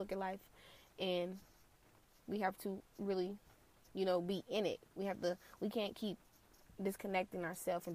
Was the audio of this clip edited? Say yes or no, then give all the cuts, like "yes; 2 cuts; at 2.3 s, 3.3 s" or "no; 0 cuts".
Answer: no; 0 cuts